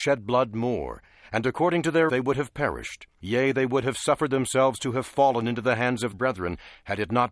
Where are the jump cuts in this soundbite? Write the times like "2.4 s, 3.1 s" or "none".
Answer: 1.1 s, 2.1 s, 6.1 s